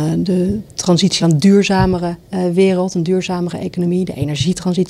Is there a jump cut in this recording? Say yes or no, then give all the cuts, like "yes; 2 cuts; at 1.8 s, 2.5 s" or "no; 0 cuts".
yes; 2 cuts; at 1.2 s, 2.2 s